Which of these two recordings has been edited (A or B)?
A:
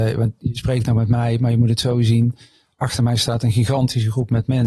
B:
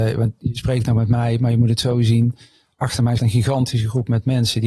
B